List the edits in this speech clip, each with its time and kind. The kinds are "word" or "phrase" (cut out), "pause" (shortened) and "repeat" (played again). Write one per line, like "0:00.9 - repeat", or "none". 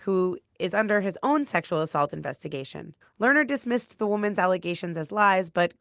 0:03.0 - pause

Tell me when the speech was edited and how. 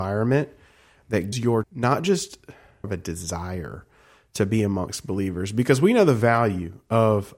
0:01.3 - word
0:01.6 - word
0:02.8 - phrase

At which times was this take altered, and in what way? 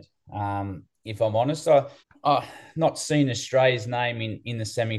0:02.0 - pause

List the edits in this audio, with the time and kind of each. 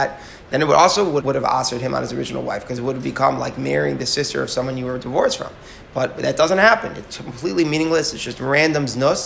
0:01.2 - word

